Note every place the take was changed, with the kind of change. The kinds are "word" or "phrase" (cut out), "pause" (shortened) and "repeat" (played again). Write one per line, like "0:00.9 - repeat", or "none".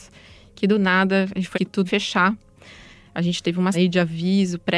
0:01.5 - word
0:01.9 - word
0:03.7 - word